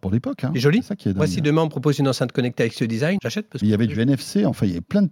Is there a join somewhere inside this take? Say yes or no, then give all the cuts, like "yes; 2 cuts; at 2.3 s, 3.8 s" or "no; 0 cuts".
yes; 1 cut; at 3.2 s